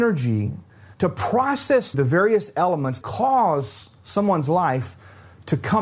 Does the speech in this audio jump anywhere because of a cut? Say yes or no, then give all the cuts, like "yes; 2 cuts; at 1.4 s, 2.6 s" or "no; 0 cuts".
yes; 3 cuts; at 0.9 s, 1.9 s, 3.0 s